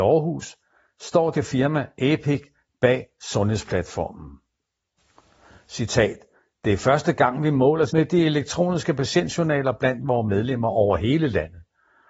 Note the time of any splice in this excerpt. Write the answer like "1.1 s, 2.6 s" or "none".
1.3 s, 7.9 s